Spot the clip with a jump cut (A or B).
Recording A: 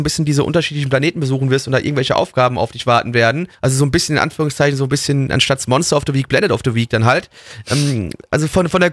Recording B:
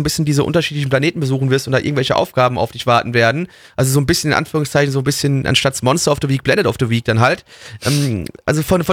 A